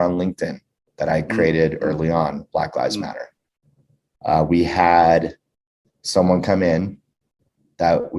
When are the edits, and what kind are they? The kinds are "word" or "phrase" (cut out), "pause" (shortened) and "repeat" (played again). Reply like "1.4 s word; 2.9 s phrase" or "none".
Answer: none